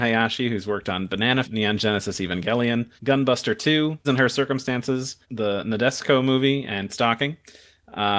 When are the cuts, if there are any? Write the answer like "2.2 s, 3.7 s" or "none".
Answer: 1.4 s, 3.0 s, 4.0 s, 5.2 s, 6.9 s

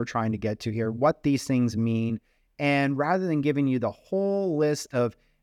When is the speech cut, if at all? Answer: none

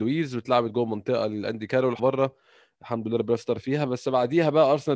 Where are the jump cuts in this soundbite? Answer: 2.0 s

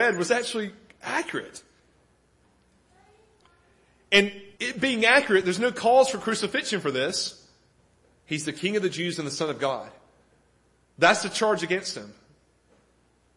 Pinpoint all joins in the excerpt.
4.5 s, 7.7 s

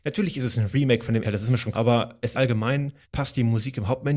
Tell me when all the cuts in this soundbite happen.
1.2 s, 1.7 s, 2.3 s, 3.0 s

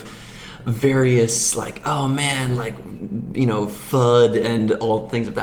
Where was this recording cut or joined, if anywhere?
none

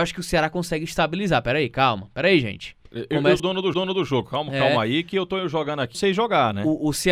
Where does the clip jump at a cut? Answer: 2.9 s, 3.4 s, 3.7 s, 5.9 s

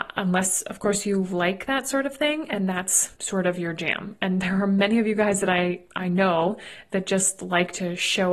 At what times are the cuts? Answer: 3.1 s

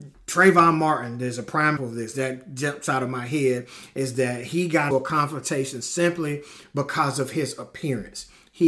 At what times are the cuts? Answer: 1.8 s, 4.9 s

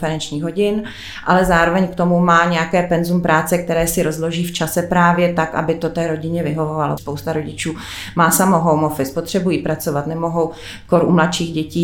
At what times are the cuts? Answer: 7.0 s

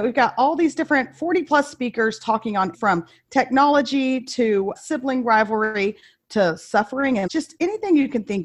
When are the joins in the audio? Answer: 2.7 s, 4.8 s, 7.3 s

